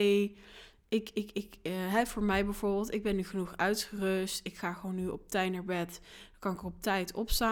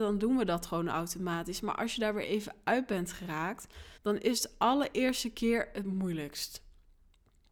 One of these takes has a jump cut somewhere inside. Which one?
second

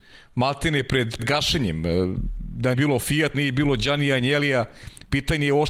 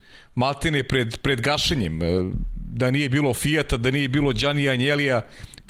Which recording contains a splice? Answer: first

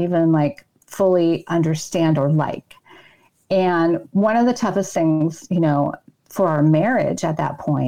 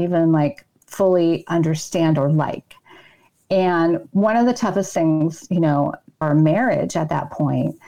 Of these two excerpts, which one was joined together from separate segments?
second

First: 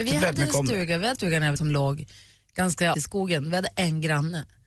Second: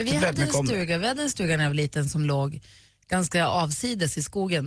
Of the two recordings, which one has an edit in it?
first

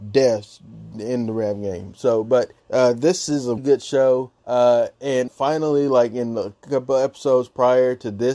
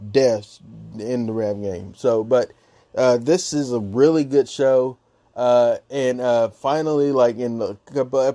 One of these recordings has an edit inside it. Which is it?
first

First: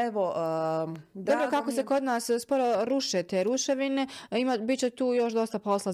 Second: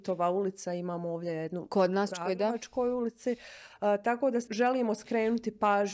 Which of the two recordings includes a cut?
second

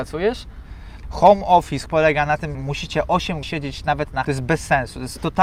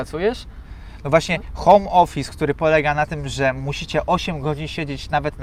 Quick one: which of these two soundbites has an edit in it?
first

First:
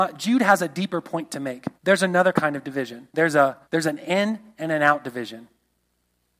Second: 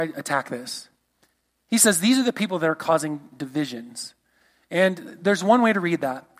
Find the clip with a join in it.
first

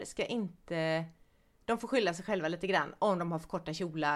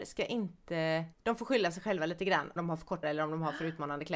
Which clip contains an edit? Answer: second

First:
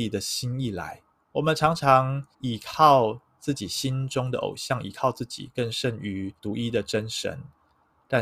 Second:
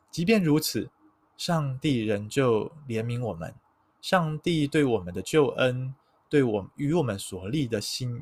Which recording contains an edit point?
first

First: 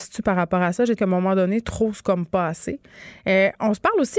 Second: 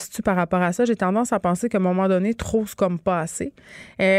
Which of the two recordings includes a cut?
first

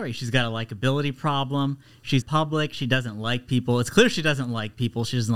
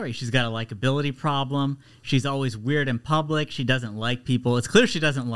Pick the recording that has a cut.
first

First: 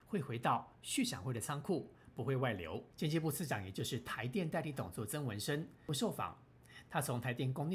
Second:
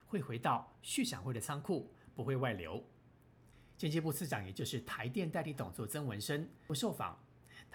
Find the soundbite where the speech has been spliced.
first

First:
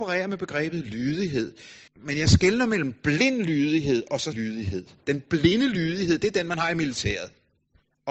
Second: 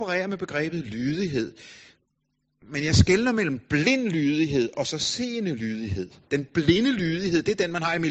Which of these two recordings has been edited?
first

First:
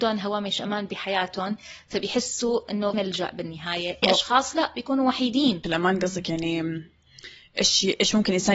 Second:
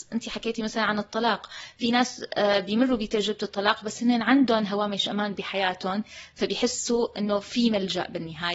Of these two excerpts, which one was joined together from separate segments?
first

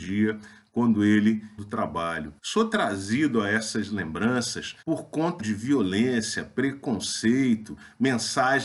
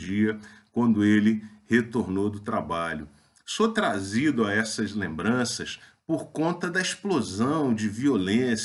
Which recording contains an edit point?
first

